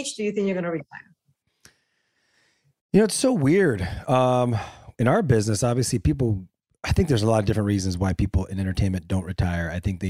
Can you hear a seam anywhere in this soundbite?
no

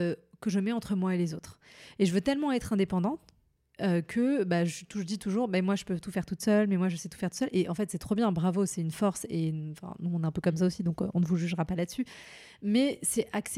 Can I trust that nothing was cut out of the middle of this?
yes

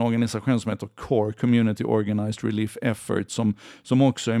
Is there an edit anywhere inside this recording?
no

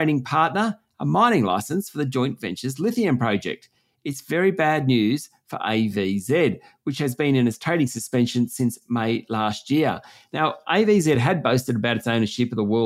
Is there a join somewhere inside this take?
no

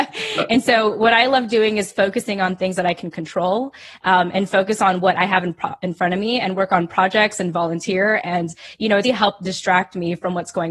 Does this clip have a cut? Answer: yes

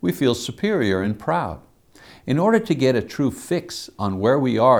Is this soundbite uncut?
yes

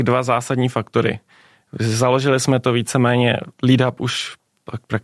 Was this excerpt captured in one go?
yes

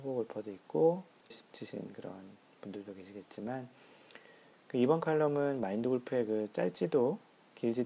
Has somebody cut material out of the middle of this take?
yes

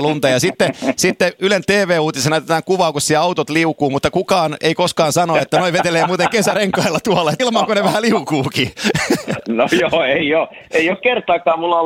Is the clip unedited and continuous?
no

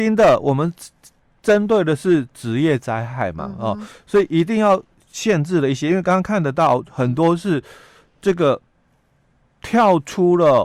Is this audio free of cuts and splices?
yes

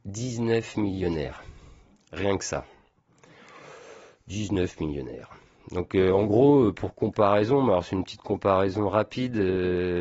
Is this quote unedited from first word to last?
yes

